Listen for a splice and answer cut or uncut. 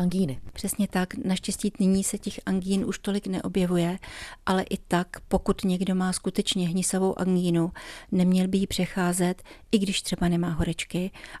uncut